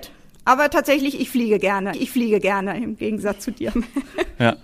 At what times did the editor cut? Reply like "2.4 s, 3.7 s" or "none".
1.9 s

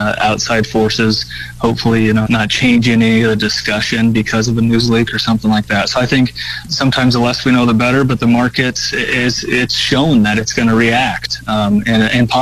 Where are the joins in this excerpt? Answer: 2.3 s, 6.7 s

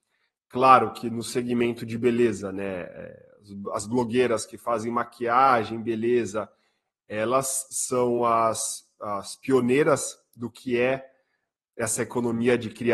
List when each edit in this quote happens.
none

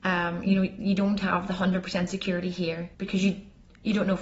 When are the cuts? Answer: 2.9 s

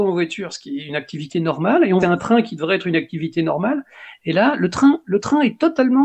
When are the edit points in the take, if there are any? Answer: 2.0 s

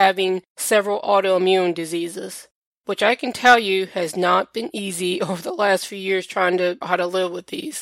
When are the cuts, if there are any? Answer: 6.8 s

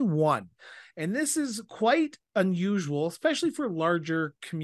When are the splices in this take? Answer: none

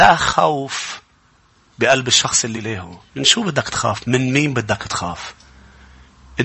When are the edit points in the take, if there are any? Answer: 2.5 s, 3.1 s

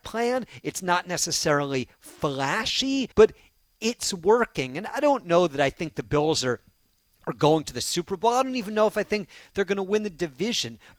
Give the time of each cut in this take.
3.1 s

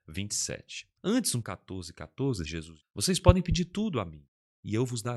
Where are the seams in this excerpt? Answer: 1.0 s, 1.4 s, 2.4 s, 2.8 s

